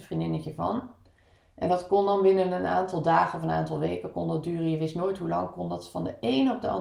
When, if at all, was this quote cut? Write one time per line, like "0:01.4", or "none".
none